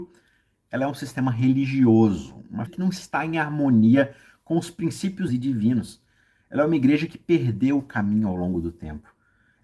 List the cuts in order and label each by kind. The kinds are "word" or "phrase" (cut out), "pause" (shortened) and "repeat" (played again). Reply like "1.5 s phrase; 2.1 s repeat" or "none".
2.7 s phrase; 5.3 s word